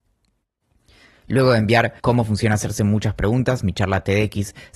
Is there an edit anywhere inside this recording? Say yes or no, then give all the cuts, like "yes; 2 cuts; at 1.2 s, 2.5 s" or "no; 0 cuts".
yes; 1 cut; at 2.0 s